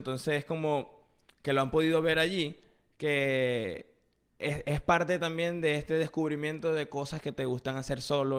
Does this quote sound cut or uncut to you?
uncut